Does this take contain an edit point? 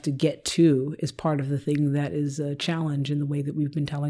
no; 0 cuts

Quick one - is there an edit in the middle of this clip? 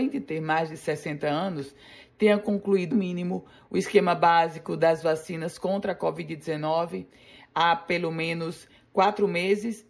yes; 1 cut; at 2.9 s

